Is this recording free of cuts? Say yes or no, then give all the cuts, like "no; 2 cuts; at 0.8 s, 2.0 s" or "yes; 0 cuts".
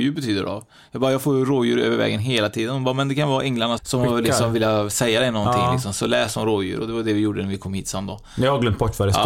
no; 1 cut; at 3.8 s